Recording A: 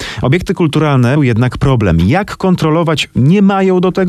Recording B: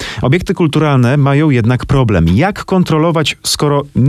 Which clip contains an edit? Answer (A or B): A